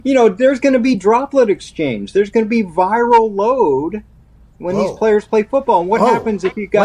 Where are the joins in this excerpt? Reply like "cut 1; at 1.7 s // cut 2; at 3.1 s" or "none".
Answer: none